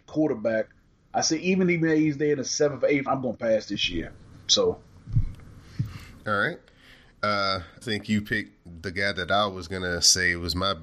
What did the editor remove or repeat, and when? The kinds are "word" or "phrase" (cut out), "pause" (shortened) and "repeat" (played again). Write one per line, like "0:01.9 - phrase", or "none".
0:03.1 - word
0:04.4 - pause
0:07.8 - word